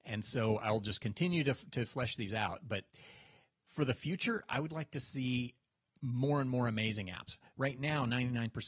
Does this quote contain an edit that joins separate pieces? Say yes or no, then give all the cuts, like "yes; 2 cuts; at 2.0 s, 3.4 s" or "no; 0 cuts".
no; 0 cuts